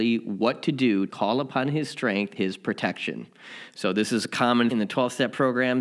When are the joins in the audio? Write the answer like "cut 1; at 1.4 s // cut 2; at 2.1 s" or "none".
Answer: cut 1; at 1.1 s // cut 2; at 2.4 s // cut 3; at 4.7 s